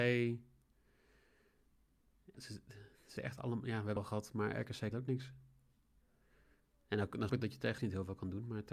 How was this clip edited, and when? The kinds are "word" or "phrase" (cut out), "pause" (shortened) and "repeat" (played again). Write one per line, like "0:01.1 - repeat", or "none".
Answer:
0:02.3 - word
0:03.2 - word
0:04.0 - word
0:04.9 - word
0:07.3 - word
0:07.8 - word